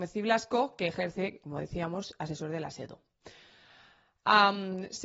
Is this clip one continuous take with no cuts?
yes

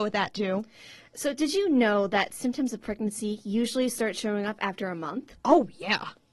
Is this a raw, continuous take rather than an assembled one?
yes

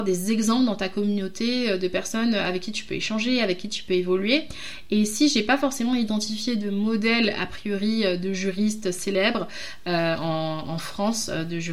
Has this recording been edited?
no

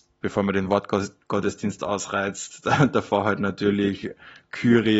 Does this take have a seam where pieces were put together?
no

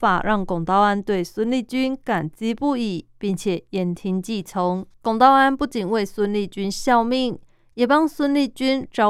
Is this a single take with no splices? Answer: no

